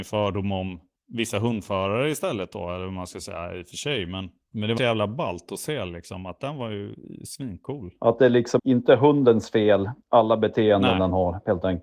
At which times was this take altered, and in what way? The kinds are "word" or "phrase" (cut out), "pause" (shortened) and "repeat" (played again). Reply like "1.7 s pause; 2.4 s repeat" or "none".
0.9 s pause; 4.8 s phrase; 8.6 s word; 10.0 s pause

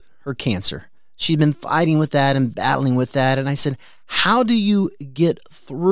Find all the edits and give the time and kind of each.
none

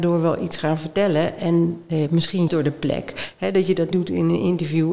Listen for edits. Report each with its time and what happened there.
2.5 s word; 3.9 s word

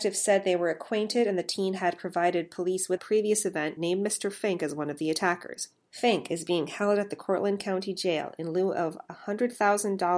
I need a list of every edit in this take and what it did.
3.0 s phrase; 3.8 s word

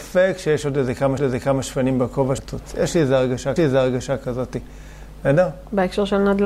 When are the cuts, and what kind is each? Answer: 1.2 s repeat; 2.4 s word; 3.6 s repeat

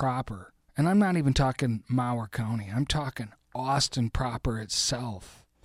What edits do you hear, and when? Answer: none

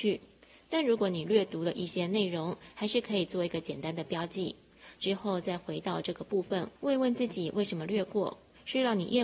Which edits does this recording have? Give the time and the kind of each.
6.8 s pause

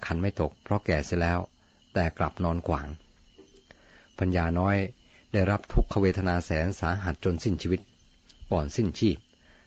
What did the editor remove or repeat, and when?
none

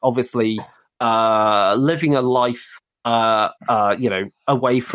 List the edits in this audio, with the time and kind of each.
3.6 s pause

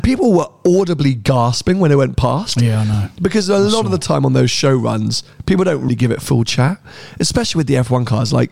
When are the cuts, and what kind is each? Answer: 5.9 s word

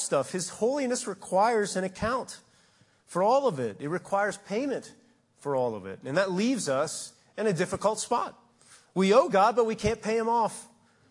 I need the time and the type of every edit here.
none

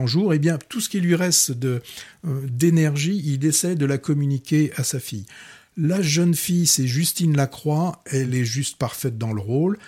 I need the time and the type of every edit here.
none

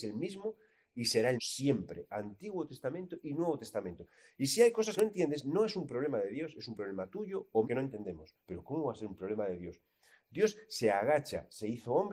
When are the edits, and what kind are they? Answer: 1.4 s word; 5.0 s phrase; 7.6 s word; 8.4 s pause

